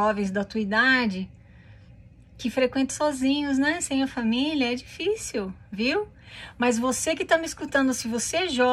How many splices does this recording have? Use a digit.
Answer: 1